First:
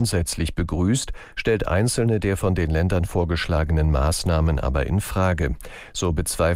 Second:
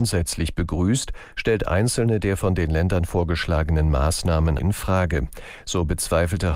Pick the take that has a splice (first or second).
second